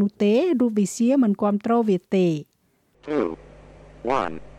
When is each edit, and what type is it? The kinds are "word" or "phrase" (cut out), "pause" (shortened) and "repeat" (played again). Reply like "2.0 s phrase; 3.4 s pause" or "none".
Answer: none